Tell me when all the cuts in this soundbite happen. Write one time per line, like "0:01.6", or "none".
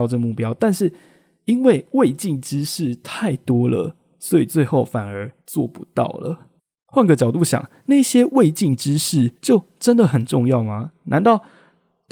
0:05.4
0:06.6
0:09.4